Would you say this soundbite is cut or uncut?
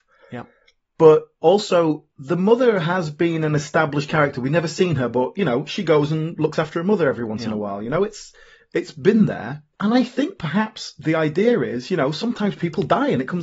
uncut